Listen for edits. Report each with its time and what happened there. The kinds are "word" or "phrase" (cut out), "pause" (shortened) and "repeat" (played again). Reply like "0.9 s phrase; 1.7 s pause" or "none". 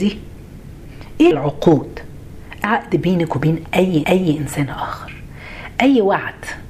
1.3 s word; 2.6 s word; 4.0 s repeat